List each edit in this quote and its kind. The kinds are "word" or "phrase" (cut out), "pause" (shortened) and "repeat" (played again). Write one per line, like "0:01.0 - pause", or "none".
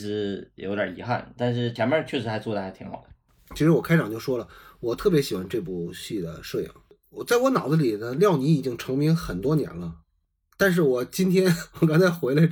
none

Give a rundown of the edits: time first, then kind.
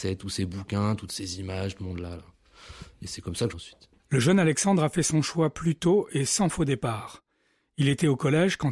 0:01.8 - phrase
0:03.5 - phrase
0:04.0 - pause

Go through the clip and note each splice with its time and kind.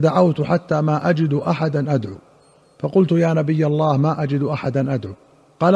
none

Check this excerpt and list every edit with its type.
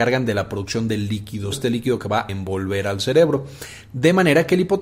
0:01.5 - word
0:02.3 - word

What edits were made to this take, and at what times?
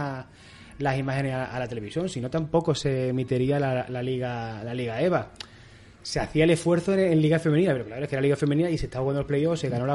none

